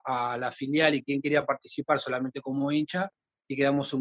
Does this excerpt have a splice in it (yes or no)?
no